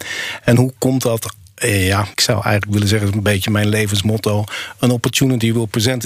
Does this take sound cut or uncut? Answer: cut